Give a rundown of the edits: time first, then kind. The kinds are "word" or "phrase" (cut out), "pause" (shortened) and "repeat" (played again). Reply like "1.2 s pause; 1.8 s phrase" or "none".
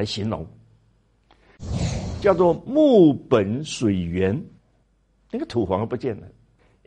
4.6 s pause

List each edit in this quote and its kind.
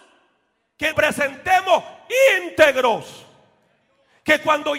0.9 s word

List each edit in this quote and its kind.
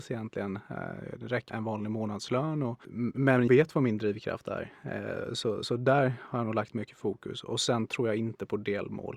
1.5 s word; 3.5 s word; 5.6 s word

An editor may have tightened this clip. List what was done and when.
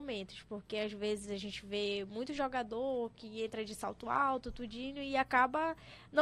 none

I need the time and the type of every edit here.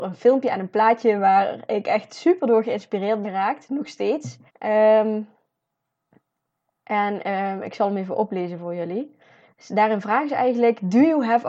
3.2 s word; 4.5 s pause

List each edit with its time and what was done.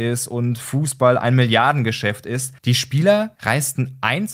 2.6 s pause; 3.4 s pause

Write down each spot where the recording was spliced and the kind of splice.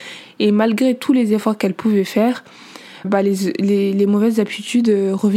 3.0 s word

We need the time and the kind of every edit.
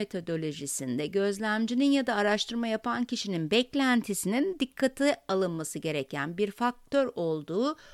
none

